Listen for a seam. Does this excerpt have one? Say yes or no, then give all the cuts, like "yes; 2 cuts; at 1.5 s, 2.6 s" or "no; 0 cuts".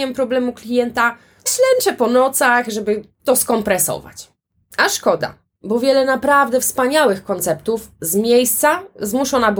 yes; 1 cut; at 1.5 s